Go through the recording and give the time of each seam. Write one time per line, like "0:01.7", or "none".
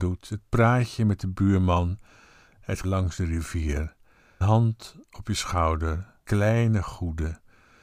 0:02.8
0:04.4
0:06.2

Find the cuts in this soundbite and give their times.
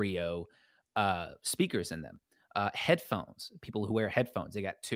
none

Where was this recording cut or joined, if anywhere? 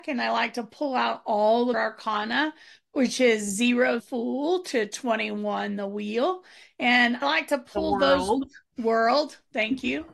0:01.7
0:04.0
0:07.2
0:08.7

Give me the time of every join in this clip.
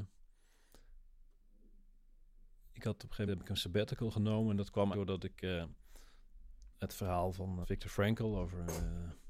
0:03.3
0:04.9
0:06.7
0:07.6

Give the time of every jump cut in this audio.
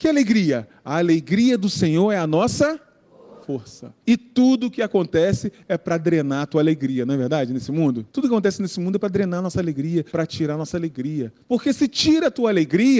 0:03.4
0:04.0
0:08.1
0:10.1
0:11.4

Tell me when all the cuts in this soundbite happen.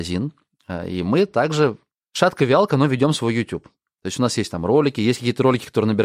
none

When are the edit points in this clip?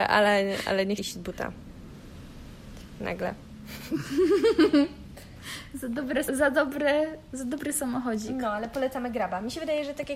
0:01.0
0:06.3

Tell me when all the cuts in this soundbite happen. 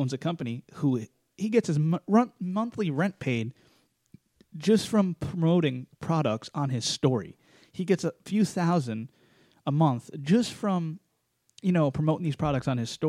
none

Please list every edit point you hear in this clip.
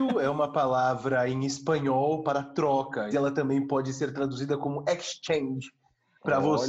0:03.1

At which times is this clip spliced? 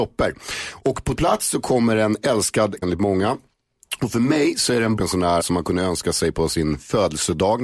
0:01.2
0:02.8
0:05.0
0:05.4

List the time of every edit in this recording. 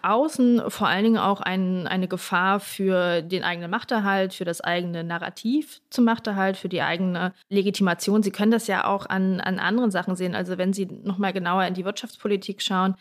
0:07.4

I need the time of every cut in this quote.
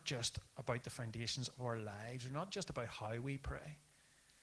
none

